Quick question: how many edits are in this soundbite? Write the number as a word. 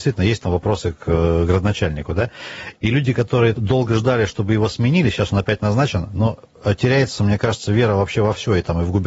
one